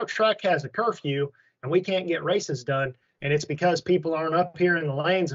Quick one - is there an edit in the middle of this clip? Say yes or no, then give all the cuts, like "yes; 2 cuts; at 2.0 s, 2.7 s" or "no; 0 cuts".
no; 0 cuts